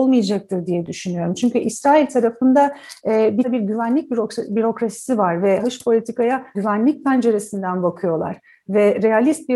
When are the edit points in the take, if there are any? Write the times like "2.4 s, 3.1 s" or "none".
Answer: 3.4 s, 5.6 s, 6.5 s

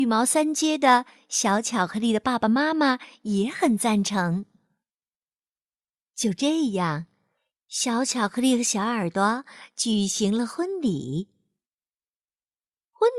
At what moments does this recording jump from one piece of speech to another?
none

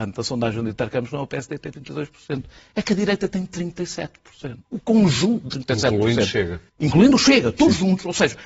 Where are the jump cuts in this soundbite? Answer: 4.6 s, 5.5 s, 6.7 s

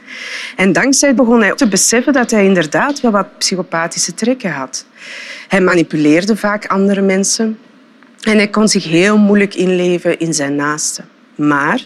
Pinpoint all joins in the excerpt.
1.2 s, 1.6 s

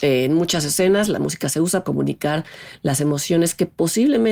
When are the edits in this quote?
1.8 s

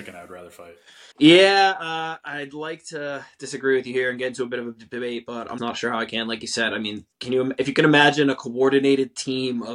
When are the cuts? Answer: 1.1 s, 5.6 s

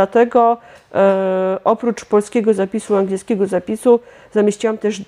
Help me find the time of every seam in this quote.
none

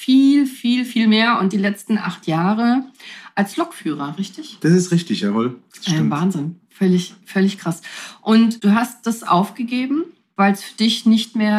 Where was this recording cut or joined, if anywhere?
none

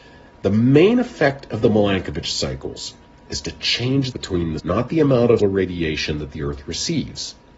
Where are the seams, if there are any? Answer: 4.1 s, 4.6 s, 5.4 s

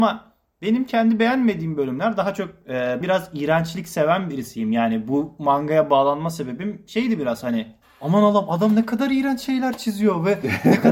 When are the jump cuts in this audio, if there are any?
3.0 s

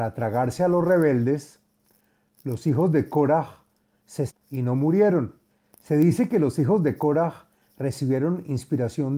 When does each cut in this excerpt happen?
4.3 s, 5.5 s

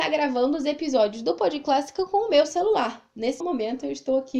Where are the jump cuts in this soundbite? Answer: 3.4 s

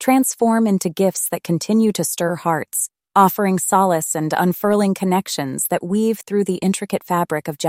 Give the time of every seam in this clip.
none

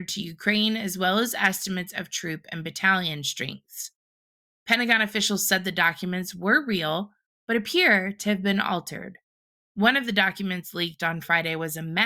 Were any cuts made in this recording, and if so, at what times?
none

